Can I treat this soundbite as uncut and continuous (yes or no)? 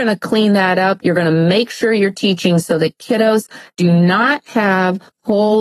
yes